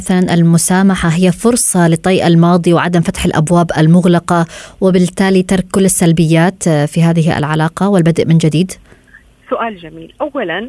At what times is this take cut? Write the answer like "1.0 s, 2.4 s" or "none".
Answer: none

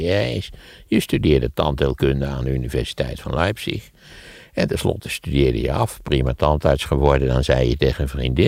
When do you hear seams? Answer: none

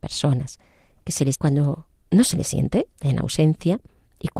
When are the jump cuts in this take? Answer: 1.3 s, 1.9 s, 2.9 s

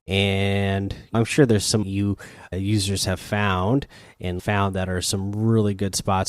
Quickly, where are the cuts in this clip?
1.1 s, 1.8 s, 2.5 s, 4.4 s

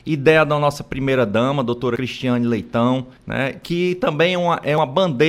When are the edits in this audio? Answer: 3.2 s

